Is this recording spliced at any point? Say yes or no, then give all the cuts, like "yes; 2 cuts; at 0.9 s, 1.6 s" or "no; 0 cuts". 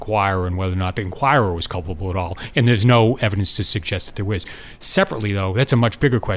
no; 0 cuts